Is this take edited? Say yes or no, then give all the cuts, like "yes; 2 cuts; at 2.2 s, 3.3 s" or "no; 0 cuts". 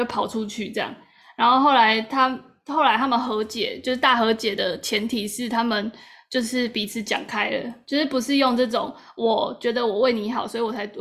no; 0 cuts